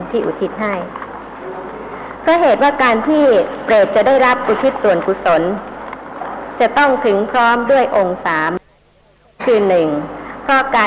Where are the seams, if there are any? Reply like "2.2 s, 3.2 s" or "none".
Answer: none